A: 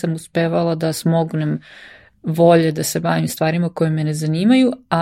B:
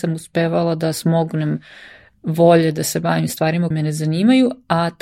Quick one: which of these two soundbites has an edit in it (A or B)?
B